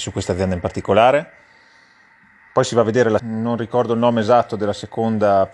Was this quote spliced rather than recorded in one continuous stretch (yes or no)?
yes